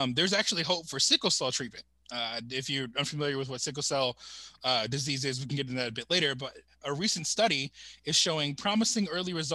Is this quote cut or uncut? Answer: uncut